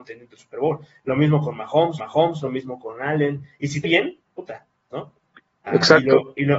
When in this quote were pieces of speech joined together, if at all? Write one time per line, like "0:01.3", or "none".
0:02.0
0:03.8
0:04.9
0:05.7

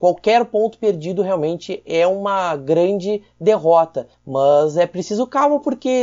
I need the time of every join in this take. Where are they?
0:04.1

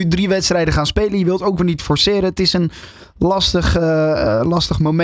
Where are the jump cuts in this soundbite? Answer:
none

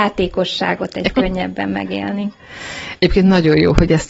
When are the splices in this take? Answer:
0:01.1

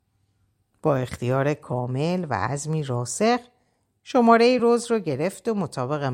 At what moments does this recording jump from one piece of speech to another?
none

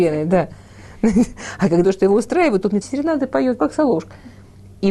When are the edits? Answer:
0:01.8
0:02.8
0:03.6

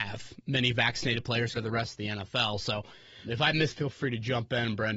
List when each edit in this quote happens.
0:01.5
0:03.2
0:03.7

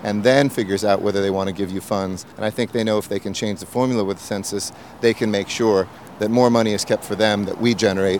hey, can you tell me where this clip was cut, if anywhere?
0:02.3

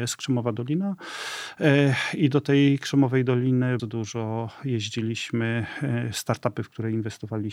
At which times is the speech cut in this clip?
0:03.8

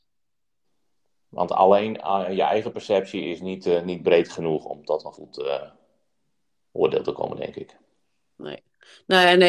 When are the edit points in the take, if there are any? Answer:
none

